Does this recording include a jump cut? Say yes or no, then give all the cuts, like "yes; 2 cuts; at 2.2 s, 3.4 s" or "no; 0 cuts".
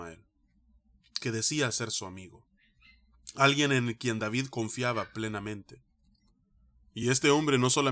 no; 0 cuts